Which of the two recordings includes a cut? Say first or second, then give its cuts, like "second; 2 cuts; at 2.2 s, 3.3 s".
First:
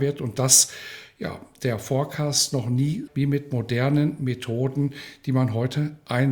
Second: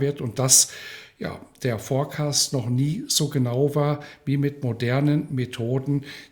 first; 1 cut; at 3.1 s